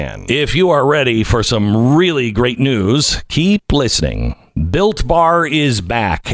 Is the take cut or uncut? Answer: uncut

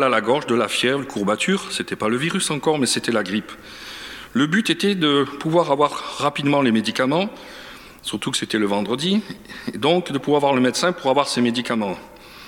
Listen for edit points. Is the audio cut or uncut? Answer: uncut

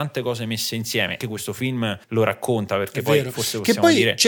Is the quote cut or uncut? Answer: cut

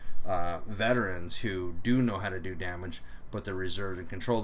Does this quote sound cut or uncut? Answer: uncut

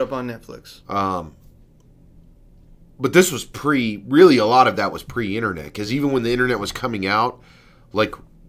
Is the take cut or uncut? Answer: uncut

